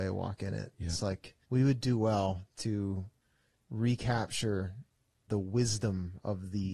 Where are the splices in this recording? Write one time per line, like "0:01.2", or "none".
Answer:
0:01.4
0:02.5
0:05.3

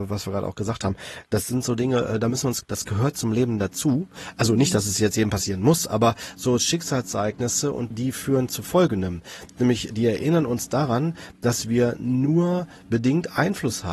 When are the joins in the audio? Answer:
0:02.6
0:07.9
0:09.9

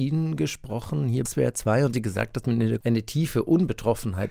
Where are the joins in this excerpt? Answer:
0:01.3
0:01.9
0:02.8

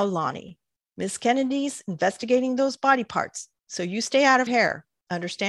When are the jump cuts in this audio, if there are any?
0:04.5

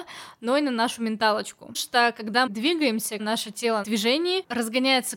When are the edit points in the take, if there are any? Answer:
0:01.7
0:02.5
0:03.2
0:03.8

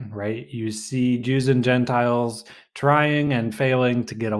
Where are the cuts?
none

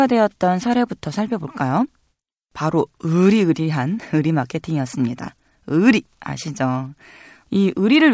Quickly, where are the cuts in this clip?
none

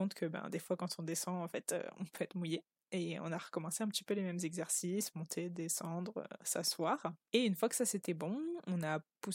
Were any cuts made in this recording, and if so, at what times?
none

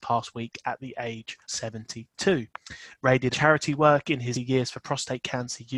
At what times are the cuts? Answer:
0:01.4
0:03.3
0:04.3

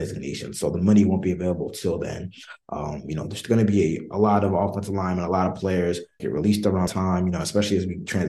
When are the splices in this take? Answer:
0:06.2
0:06.9

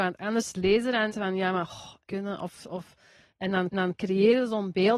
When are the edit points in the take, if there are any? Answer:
0:01.1
0:02.1
0:03.7

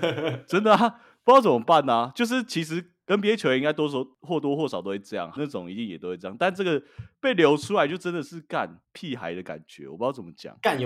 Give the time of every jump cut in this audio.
0:05.4

